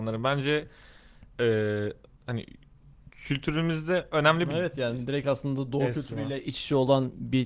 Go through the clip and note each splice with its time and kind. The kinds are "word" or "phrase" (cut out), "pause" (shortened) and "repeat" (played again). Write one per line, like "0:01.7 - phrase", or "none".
none